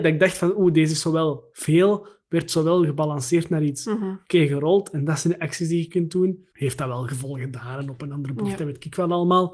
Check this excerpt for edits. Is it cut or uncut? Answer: cut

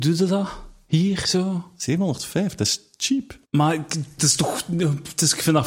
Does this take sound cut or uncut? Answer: cut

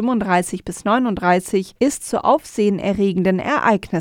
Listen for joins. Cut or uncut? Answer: cut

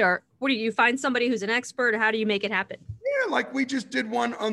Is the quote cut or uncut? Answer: uncut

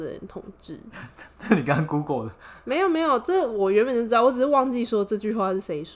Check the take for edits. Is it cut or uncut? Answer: uncut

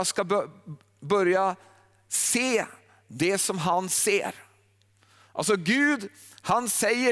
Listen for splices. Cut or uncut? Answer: uncut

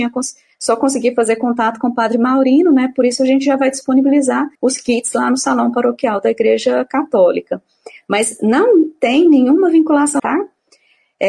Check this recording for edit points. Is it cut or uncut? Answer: cut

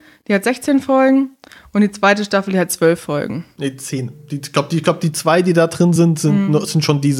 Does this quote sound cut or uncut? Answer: uncut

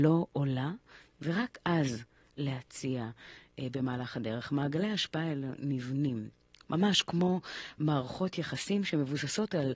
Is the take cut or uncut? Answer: uncut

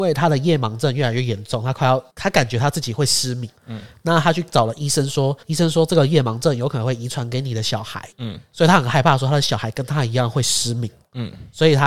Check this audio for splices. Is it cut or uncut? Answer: cut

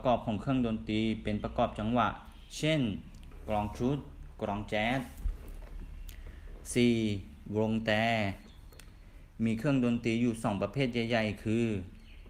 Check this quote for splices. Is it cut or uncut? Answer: uncut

